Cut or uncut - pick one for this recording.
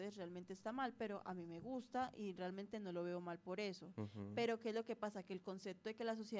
uncut